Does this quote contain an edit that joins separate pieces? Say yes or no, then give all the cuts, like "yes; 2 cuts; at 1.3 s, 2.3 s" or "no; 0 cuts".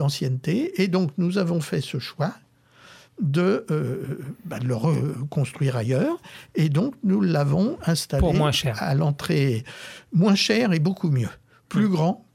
no; 0 cuts